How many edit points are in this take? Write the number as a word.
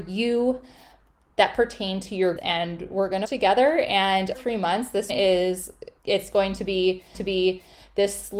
six